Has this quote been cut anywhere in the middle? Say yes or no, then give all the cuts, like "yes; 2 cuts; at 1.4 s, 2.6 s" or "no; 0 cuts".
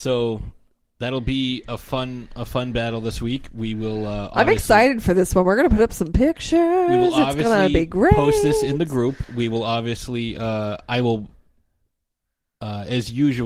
no; 0 cuts